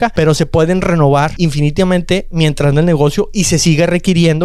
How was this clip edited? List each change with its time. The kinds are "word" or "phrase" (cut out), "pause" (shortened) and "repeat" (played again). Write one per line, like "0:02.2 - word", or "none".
0:01.4 - word
0:02.7 - phrase